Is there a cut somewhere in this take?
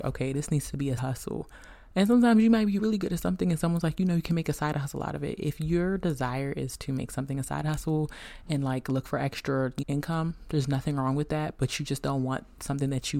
yes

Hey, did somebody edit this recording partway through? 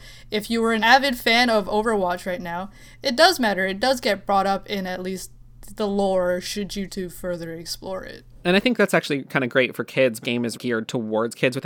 yes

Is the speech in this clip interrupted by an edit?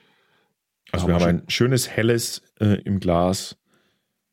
yes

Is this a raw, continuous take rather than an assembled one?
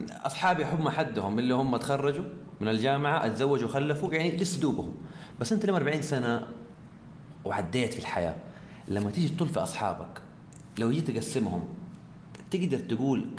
yes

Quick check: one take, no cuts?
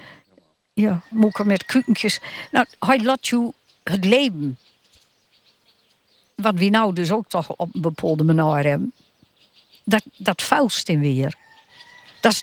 no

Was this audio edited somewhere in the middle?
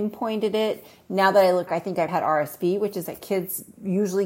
yes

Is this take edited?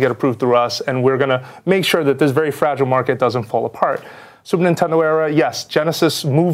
no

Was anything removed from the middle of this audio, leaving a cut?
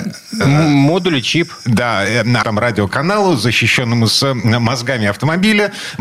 yes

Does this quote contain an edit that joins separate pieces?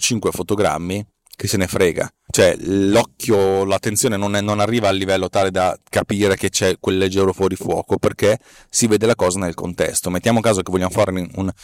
no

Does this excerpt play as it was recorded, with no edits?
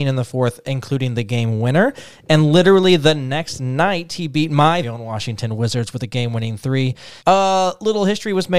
no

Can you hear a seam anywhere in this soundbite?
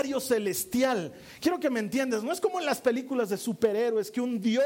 no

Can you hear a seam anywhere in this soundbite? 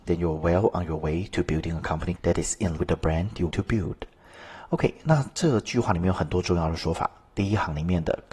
yes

